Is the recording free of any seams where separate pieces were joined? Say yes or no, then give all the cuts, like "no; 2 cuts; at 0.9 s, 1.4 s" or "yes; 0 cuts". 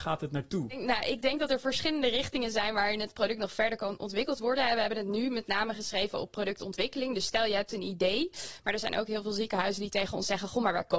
yes; 0 cuts